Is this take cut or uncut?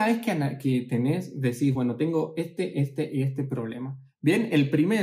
uncut